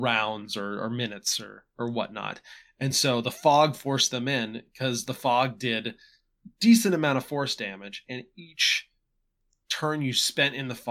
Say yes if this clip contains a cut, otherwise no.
no